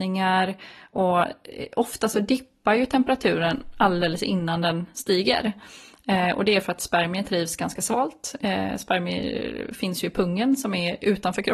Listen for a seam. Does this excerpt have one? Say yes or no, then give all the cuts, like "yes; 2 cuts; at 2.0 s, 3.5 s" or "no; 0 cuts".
no; 0 cuts